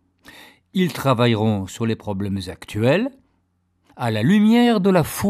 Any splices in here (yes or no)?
no